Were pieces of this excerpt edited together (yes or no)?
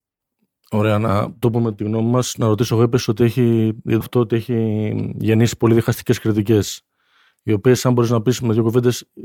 yes